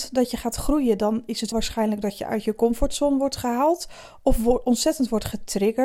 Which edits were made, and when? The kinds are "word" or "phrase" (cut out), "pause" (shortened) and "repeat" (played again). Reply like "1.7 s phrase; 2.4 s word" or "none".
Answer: 1.5 s word